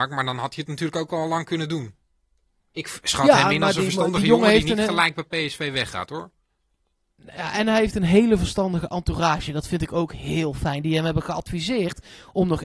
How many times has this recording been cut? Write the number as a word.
zero